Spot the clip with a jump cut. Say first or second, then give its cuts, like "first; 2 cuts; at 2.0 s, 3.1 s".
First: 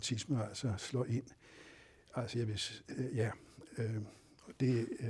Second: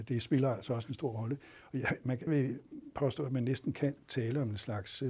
second; 1 cut; at 2.3 s